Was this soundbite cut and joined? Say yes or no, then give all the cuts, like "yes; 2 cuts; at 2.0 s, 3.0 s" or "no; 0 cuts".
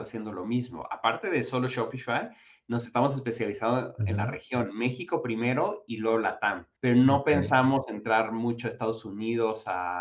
yes; 1 cut; at 6.8 s